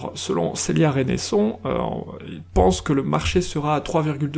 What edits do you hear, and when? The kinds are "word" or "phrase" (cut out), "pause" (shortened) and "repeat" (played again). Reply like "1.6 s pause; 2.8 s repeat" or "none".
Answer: none